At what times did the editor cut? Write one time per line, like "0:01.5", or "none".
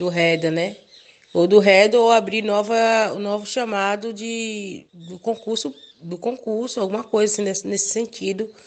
0:04.9
0:05.9